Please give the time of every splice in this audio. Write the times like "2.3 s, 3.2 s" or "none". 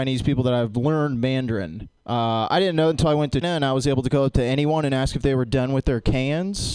2.9 s, 3.4 s